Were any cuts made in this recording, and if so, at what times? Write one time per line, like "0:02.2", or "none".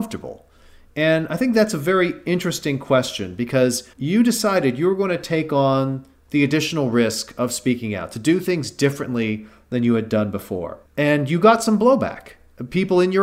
0:03.9
0:10.8